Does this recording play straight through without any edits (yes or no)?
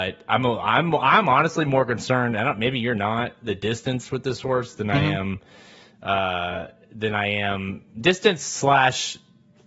yes